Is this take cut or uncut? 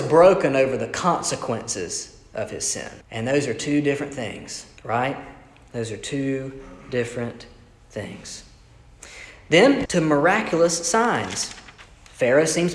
cut